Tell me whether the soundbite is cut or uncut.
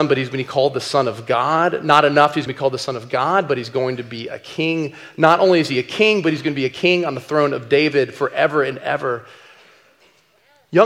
cut